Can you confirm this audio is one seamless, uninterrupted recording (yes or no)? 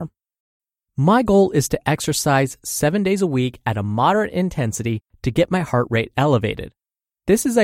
yes